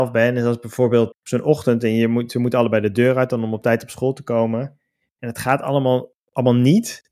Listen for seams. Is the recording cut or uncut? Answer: cut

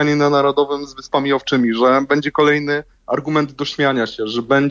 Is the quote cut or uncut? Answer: uncut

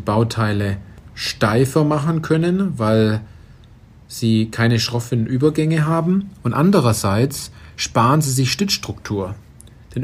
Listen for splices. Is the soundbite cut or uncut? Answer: uncut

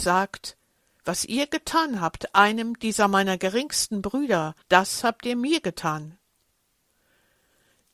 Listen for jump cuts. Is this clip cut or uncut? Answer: cut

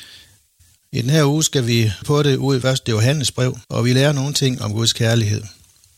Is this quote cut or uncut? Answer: cut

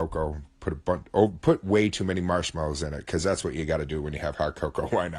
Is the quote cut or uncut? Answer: uncut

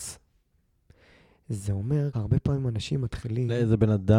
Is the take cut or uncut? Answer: cut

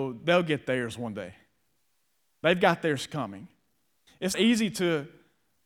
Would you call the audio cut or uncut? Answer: cut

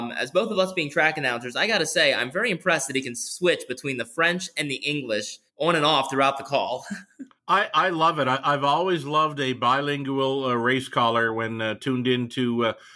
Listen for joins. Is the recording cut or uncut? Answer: cut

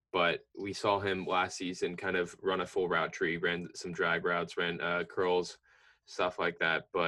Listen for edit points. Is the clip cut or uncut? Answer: uncut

